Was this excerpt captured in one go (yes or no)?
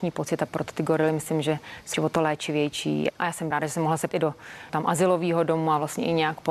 no